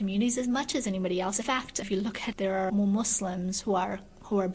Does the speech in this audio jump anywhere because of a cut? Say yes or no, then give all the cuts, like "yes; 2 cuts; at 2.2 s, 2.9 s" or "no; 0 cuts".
yes; 4 cuts; at 1.4 s, 1.8 s, 2.3 s, 2.7 s